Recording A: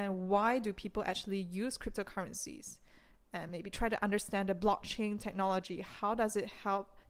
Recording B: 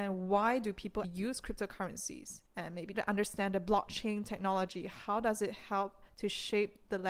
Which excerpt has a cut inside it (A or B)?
B